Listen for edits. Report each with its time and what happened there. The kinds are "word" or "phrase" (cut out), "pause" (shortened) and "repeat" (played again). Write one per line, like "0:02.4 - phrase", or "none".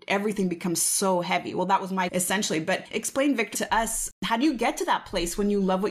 0:02.1 - word
0:03.5 - word